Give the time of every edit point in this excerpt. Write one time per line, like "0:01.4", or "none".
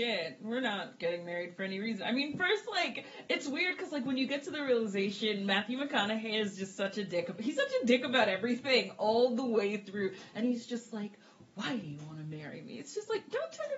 none